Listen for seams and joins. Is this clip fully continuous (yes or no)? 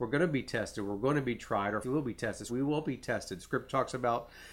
no